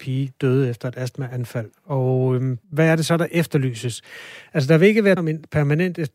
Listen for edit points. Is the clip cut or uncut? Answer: cut